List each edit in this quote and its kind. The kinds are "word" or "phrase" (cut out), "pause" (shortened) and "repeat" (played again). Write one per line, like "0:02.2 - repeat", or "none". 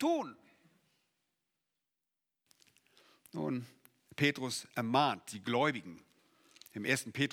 none